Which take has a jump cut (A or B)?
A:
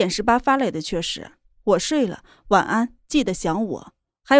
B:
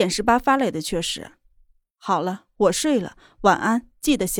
A